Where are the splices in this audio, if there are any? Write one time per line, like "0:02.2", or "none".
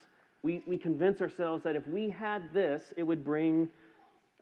none